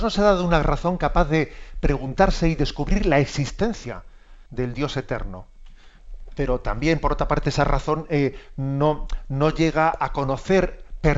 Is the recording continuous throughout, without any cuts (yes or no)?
no